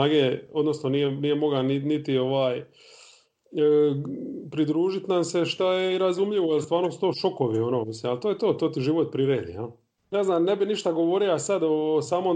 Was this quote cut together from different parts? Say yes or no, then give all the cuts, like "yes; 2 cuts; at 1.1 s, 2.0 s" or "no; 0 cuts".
yes; 1 cut; at 10.0 s